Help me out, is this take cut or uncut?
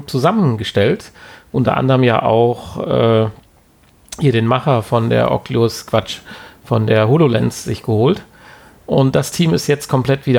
uncut